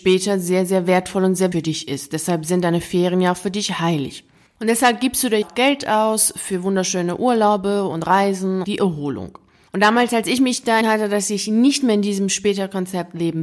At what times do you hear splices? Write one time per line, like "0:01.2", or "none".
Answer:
0:01.5
0:05.4
0:08.6
0:10.8